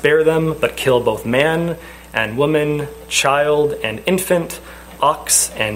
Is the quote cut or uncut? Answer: uncut